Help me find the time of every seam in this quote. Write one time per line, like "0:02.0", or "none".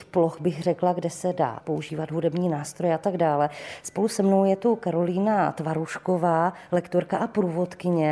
0:01.6